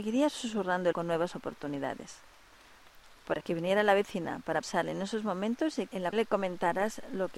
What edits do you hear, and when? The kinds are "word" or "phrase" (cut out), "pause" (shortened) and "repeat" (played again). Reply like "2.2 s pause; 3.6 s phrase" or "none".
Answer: 0.9 s word; 3.4 s word; 4.6 s word; 6.1 s word